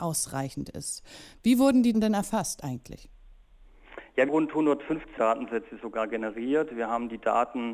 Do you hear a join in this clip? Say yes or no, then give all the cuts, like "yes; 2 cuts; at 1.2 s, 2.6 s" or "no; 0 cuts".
yes; 3 cuts; at 1.9 s, 4.3 s, 5.2 s